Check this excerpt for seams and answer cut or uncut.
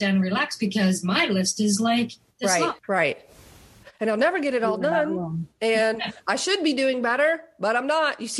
cut